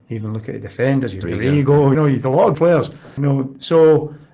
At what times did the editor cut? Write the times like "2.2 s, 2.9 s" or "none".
1.2 s, 1.9 s, 2.5 s, 3.2 s